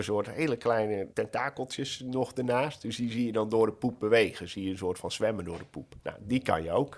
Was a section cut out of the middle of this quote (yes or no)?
yes